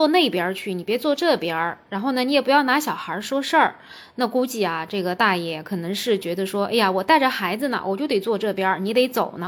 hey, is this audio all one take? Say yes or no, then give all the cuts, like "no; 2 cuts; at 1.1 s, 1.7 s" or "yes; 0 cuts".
yes; 0 cuts